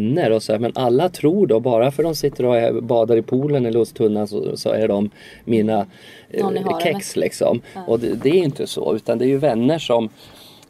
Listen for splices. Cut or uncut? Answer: uncut